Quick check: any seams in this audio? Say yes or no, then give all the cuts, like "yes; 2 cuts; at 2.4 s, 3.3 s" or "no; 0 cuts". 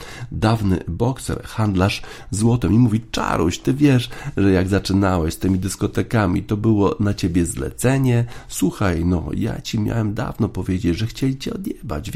no; 0 cuts